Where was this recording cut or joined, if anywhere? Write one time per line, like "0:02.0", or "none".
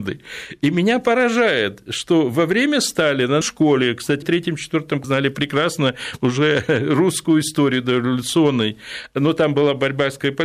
0:03.4
0:04.2
0:05.0